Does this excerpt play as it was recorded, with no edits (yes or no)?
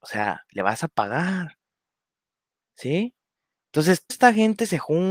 no